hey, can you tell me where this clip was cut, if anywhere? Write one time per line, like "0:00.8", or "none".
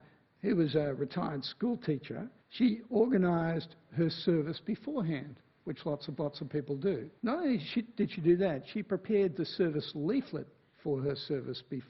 0:02.4
0:06.2
0:07.2